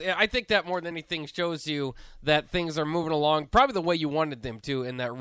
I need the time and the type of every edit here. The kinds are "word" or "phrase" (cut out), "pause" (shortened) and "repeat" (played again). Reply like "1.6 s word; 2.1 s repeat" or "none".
none